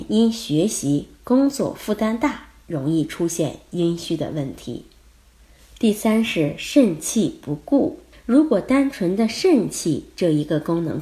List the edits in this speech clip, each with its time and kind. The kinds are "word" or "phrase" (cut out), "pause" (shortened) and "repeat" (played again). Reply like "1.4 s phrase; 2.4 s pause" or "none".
8.1 s pause